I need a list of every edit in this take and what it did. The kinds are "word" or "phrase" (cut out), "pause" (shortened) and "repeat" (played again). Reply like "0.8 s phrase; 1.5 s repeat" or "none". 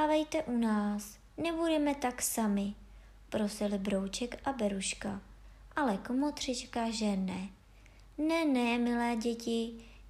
1.3 s pause